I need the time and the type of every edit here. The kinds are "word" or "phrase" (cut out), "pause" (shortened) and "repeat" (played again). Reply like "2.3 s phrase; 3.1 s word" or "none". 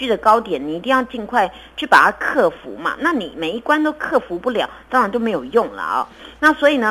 none